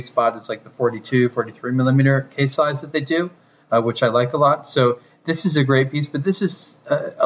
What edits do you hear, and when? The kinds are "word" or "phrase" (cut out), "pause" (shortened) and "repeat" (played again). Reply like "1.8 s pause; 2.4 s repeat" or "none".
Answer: none